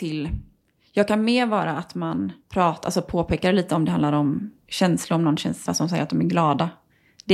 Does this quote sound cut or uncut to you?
cut